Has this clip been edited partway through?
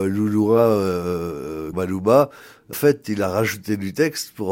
yes; 2 cuts; at 1.7 s, 2.7 s

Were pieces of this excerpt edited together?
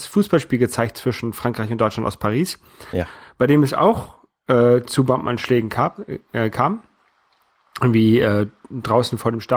no; 0 cuts

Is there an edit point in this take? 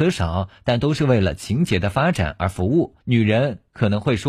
yes; 1 cut; at 3.0 s

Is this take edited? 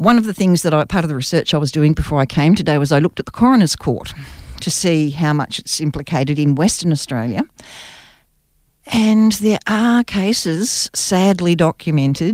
no; 0 cuts

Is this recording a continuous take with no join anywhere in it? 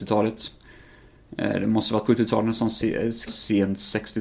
no; 2 cuts; at 2.0 s, 3.3 s

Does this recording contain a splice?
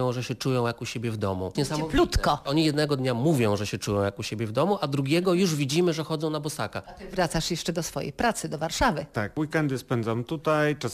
no; 0 cuts

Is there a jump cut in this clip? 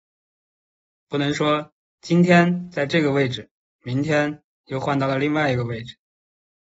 no; 0 cuts

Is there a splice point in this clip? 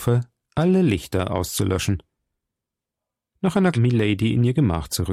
yes; 1 cut; at 3.7 s

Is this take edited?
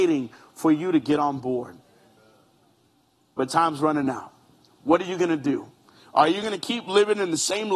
no; 0 cuts

